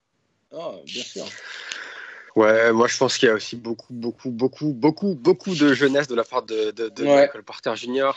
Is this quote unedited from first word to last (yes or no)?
no